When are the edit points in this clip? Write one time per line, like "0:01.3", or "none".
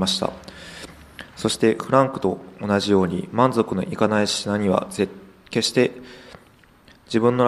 none